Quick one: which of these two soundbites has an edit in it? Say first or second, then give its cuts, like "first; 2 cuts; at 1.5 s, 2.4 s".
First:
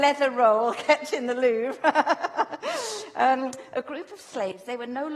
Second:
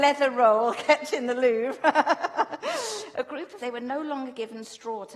second; 2 cuts; at 3.1 s, 3.6 s